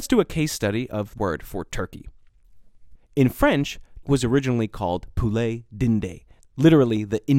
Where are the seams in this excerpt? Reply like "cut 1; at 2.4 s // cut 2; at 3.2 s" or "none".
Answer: cut 1; at 1.2 s // cut 2; at 3.0 s // cut 3; at 4.0 s